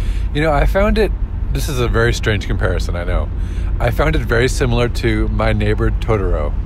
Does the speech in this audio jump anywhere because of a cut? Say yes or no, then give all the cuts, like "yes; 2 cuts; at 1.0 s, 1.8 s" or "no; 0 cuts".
no; 0 cuts